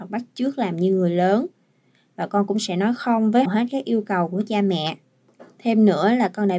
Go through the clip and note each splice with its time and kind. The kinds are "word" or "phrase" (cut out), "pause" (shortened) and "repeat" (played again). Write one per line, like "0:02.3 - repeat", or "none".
0:03.4 - word